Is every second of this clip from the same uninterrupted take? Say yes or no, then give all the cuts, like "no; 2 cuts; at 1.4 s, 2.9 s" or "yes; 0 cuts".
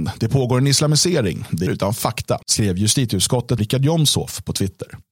no; 3 cuts; at 1.7 s, 2.4 s, 3.6 s